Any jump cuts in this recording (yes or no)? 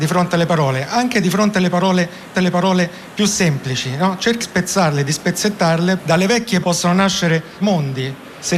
yes